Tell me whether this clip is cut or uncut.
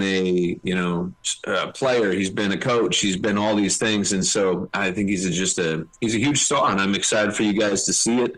uncut